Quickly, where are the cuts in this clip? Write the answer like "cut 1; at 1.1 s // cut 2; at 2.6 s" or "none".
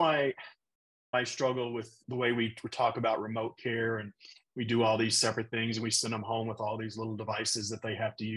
none

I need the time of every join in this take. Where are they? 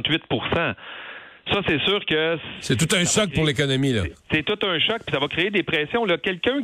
cut 1; at 4.2 s

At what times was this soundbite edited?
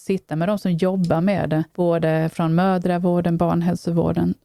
cut 1; at 1.7 s

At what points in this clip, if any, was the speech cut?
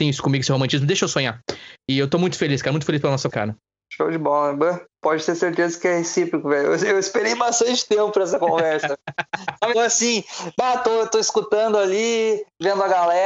cut 1; at 3.3 s // cut 2; at 5.0 s // cut 3; at 9.7 s

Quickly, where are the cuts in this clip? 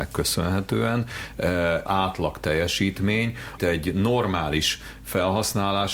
cut 1; at 1.9 s // cut 2; at 3.6 s

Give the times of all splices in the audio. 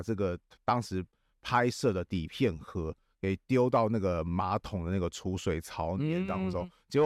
none

